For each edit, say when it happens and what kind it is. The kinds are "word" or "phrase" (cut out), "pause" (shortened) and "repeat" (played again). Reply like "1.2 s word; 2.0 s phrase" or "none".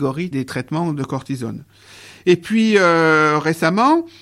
none